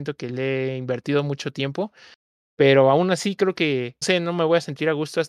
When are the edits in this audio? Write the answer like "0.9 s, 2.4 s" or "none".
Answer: 4.0 s